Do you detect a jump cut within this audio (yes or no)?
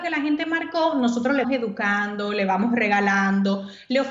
yes